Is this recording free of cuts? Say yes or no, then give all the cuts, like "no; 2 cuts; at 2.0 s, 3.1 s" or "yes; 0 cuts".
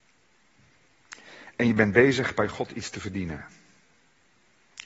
yes; 0 cuts